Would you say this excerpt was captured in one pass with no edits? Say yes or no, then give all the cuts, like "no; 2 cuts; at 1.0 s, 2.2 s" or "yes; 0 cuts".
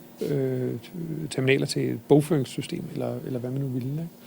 yes; 0 cuts